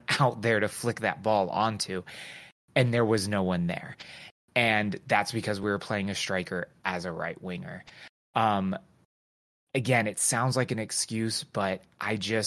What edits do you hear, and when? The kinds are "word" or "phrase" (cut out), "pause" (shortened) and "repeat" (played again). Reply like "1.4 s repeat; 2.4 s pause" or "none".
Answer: none